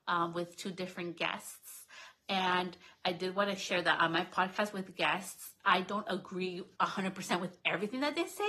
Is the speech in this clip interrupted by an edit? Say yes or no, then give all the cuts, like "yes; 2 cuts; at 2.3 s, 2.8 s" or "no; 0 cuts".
yes; 2 cuts; at 6.0 s, 6.7 s